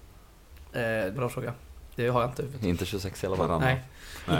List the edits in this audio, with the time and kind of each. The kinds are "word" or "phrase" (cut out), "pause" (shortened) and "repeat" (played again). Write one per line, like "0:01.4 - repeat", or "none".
0:01.2 - word